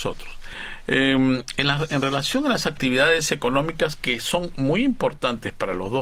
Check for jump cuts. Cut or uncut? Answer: uncut